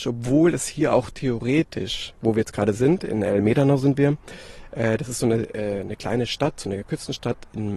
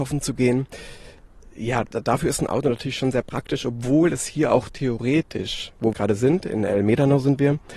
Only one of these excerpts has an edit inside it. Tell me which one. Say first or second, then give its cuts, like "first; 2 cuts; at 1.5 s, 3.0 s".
second; 1 cut; at 5.9 s